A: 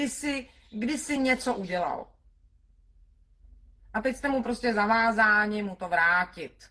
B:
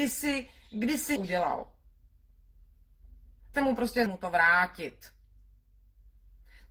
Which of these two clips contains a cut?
B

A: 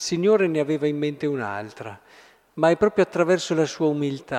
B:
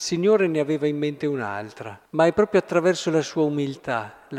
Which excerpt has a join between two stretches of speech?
B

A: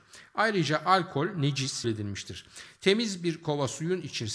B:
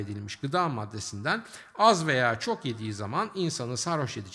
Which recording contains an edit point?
A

